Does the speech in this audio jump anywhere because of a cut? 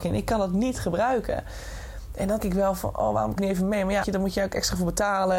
yes; 3 cuts; at 2.4 s, 3.4 s, 4.0 s

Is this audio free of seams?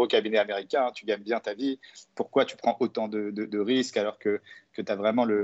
yes; 0 cuts

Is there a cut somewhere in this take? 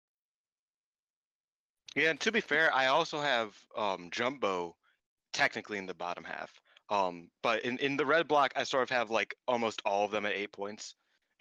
no; 0 cuts

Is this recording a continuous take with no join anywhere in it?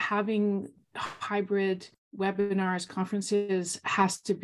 no; 1 cut; at 1.9 s

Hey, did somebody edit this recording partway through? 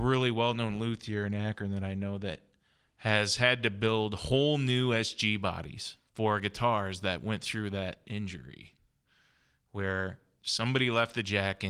yes; 1 cut; at 6.1 s

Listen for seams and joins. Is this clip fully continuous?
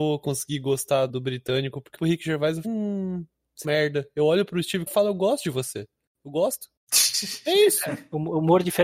no; 5 cuts; at 1.1 s, 2.0 s, 2.6 s, 3.6 s, 4.9 s

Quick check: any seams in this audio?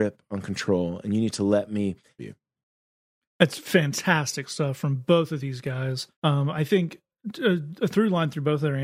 yes; 2 cuts; at 2.2 s, 6.1 s

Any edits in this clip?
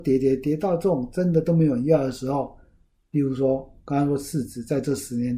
no; 0 cuts

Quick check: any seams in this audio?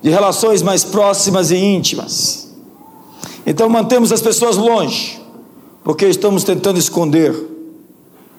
no; 0 cuts

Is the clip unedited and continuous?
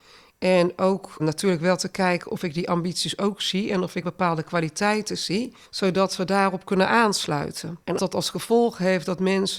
no; 4 cuts; at 1.2 s, 4.0 s, 5.6 s, 8.0 s

